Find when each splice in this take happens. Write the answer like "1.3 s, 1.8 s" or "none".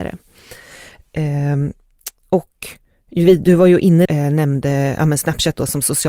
4.0 s